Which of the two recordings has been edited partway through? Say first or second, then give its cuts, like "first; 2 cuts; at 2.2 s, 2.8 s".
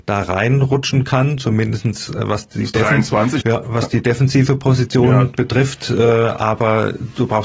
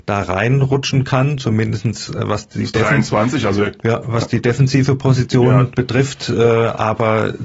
first; 1 cut; at 3.4 s